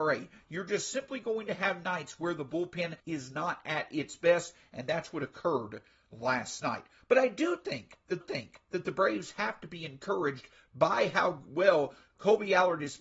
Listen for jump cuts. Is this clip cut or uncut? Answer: cut